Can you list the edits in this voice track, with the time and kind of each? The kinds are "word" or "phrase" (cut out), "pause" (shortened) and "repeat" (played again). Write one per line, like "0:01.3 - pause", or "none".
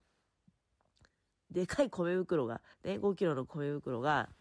0:02.7 - pause